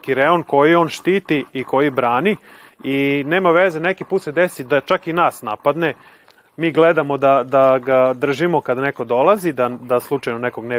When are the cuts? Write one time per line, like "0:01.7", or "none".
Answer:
none